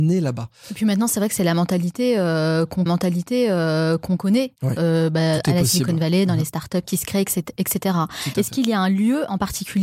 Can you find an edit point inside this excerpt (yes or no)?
yes